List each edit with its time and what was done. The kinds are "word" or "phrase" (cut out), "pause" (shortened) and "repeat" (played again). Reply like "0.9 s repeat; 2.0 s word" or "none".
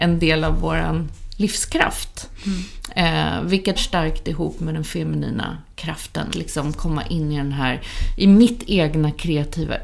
3.8 s word; 6.3 s word